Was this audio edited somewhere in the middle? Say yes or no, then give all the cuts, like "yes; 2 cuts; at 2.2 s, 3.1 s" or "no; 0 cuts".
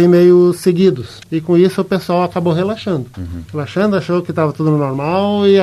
yes; 2 cuts; at 1.2 s, 3.5 s